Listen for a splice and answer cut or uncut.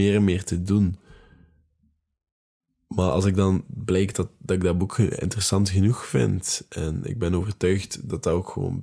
uncut